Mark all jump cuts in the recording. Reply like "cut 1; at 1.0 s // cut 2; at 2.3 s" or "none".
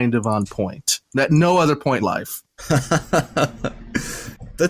cut 1; at 2.0 s

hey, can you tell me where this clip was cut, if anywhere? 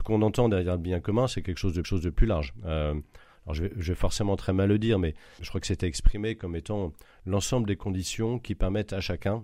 cut 1; at 1.8 s // cut 2; at 5.4 s

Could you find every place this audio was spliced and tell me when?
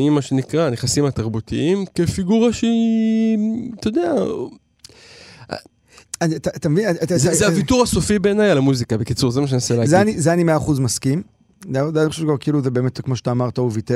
none

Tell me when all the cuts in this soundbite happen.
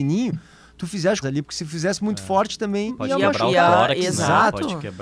cut 1; at 1.2 s // cut 2; at 2.9 s

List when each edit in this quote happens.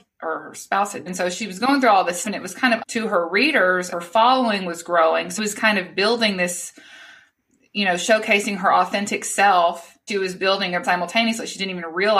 cut 1; at 1.1 s // cut 2; at 2.2 s // cut 3; at 2.8 s // cut 4; at 3.9 s // cut 5; at 5.4 s // cut 6; at 10.1 s // cut 7; at 10.8 s

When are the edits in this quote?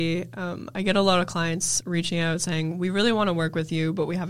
none

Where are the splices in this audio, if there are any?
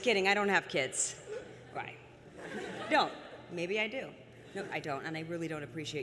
cut 1; at 1.7 s // cut 2; at 2.9 s // cut 3; at 4.7 s

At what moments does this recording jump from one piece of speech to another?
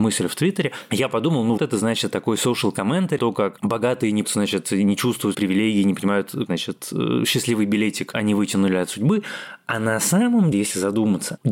cut 1; at 1.6 s // cut 2; at 3.2 s // cut 3; at 4.2 s // cut 4; at 5.3 s // cut 5; at 6.5 s // cut 6; at 10.5 s

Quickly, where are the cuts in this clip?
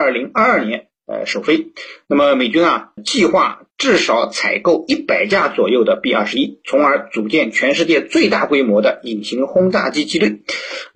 cut 1; at 1.0 s // cut 2; at 3.0 s // cut 3; at 3.7 s

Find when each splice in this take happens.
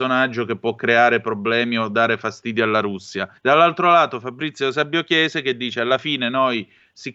cut 1; at 3.4 s

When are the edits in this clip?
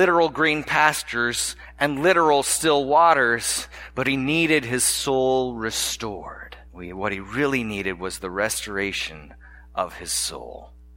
cut 1; at 6.7 s

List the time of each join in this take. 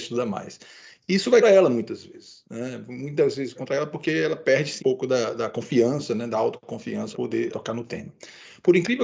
cut 1; at 1.4 s // cut 2; at 3.5 s // cut 3; at 4.8 s // cut 4; at 7.1 s // cut 5; at 7.5 s

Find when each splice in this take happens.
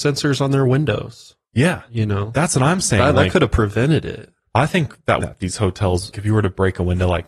cut 1; at 5.2 s // cut 2; at 6.1 s

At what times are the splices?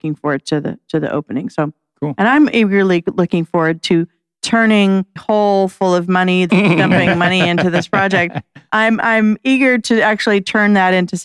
cut 1; at 5.2 s // cut 2; at 6.5 s

